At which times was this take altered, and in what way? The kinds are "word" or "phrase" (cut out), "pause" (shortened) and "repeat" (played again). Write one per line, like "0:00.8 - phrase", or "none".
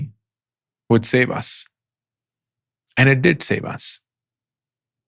none

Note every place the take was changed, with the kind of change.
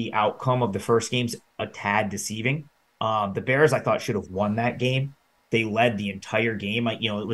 none

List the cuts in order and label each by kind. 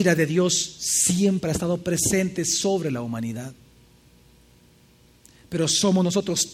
none

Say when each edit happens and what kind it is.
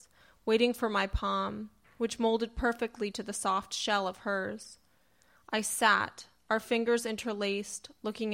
none

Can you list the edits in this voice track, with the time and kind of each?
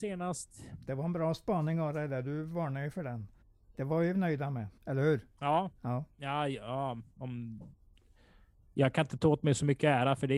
0:03.4 - pause
0:04.1 - word
0:04.8 - pause

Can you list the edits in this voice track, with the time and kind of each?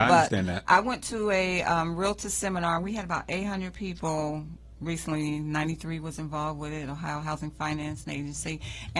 none

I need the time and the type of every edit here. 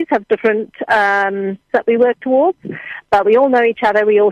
0:01.7 - phrase

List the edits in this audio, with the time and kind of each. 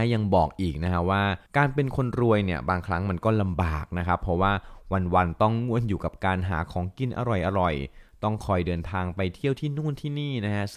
0:01.5 - pause

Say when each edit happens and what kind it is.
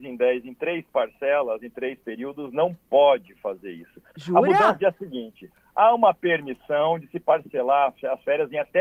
0:04.8 - word

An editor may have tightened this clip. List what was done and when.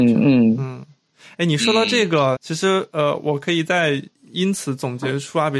0:02.4 - word

